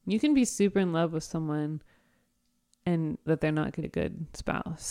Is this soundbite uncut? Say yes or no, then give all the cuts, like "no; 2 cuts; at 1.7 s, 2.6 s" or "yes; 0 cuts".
no; 2 cuts; at 3.3 s, 3.8 s